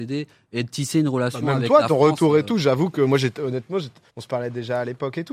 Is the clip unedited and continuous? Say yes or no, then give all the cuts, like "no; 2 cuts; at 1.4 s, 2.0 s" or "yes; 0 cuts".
no; 1 cut; at 4.1 s